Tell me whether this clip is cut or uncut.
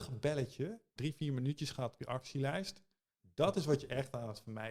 cut